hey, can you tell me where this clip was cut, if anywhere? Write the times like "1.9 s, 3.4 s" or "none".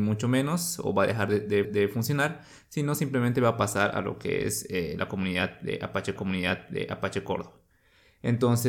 1.6 s, 6.2 s

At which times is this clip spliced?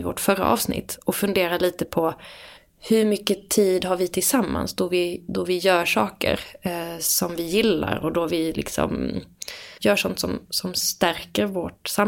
2.6 s, 9.8 s

